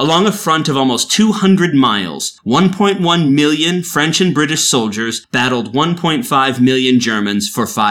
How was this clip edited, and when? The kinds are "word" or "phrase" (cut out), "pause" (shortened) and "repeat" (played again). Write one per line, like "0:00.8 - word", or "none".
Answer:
none